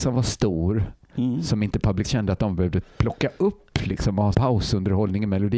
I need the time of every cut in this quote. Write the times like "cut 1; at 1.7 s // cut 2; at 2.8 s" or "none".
cut 1; at 2.0 s // cut 2; at 4.3 s